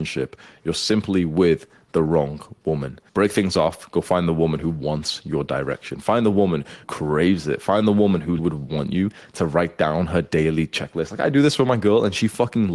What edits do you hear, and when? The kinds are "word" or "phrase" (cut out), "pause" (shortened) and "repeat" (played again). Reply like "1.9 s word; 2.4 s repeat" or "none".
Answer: 3.1 s pause; 6.8 s word; 8.4 s word

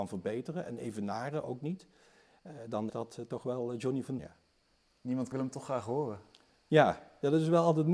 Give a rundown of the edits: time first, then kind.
2.9 s word; 4.2 s word; 5.3 s phrase

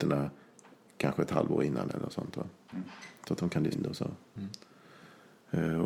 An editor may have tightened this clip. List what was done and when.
3.7 s word

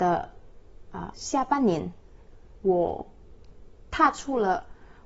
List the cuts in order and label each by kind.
1.1 s word

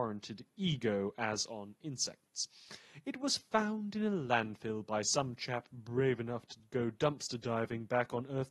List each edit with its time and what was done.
none

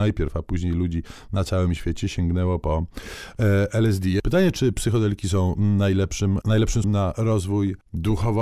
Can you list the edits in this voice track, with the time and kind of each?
6.4 s word; 6.8 s word

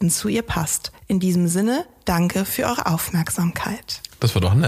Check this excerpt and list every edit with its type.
none

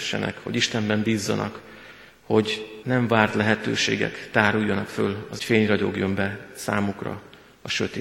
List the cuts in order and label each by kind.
2.8 s word; 5.4 s phrase

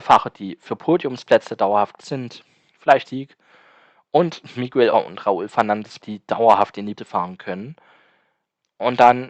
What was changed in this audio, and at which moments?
2.0 s word; 3.0 s word; 4.6 s word; 4.9 s word; 6.0 s word; 7.0 s word

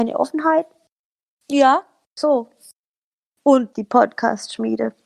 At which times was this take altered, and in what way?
3.7 s word

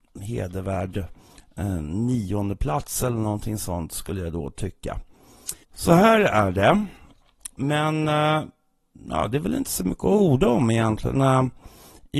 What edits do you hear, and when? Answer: 5.6 s pause; 11.2 s word

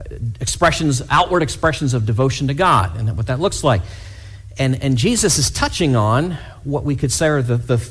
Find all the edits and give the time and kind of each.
none

